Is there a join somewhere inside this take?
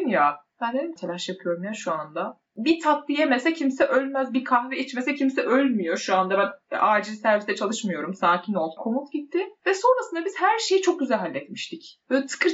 yes; 2 cuts; at 1.0 s, 8.8 s

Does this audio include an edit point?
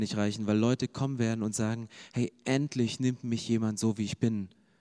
no; 0 cuts

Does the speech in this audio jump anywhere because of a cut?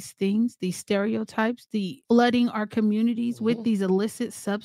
yes; 1 cut; at 2.0 s

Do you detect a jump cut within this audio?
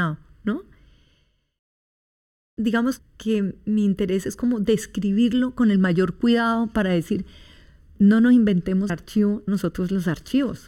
yes; 3 cuts; at 3.0 s, 8.9 s, 9.5 s

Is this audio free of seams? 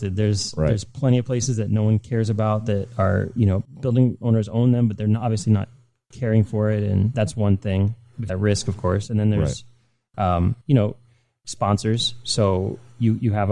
no; 3 cuts; at 7.1 s, 8.3 s, 10.6 s

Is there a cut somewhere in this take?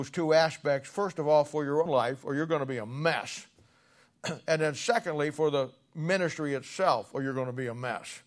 yes; 1 cut; at 1.9 s

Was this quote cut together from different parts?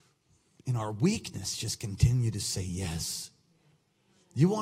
no; 0 cuts

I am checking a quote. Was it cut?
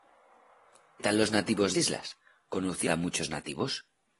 yes; 3 cuts; at 1.0 s, 1.7 s, 2.9 s

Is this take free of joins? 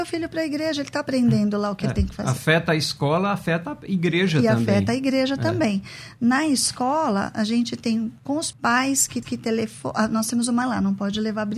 no; 3 cuts; at 8.5 s, 9.2 s, 10.6 s

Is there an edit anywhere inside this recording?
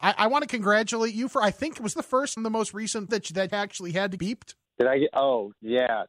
yes; 6 cuts; at 1.9 s, 2.4 s, 3.1 s, 3.5 s, 4.2 s, 4.7 s

